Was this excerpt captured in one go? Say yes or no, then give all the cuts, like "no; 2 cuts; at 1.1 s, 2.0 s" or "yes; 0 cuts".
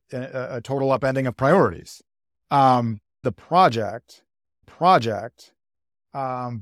no; 2 cuts; at 3.2 s, 4.6 s